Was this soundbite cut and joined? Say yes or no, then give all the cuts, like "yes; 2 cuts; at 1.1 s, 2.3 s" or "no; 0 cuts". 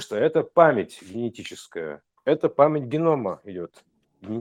yes; 1 cut; at 2.2 s